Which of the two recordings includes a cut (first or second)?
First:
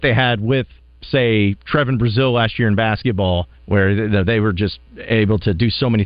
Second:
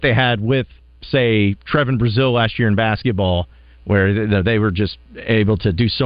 first